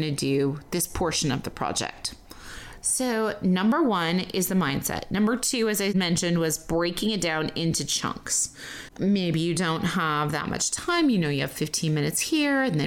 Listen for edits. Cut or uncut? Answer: uncut